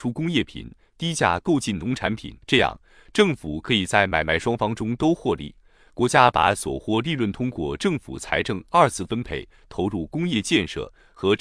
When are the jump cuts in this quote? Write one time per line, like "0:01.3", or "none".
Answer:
0:02.4